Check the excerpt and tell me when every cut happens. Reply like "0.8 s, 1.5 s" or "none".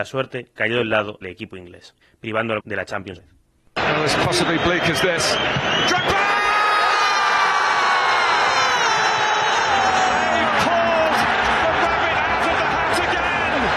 1.2 s, 2.0 s, 2.6 s, 3.2 s